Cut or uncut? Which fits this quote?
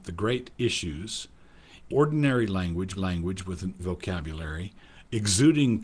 cut